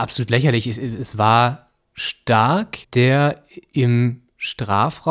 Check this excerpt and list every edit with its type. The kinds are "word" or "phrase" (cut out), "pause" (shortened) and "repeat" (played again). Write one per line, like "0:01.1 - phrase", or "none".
0:02.8 - pause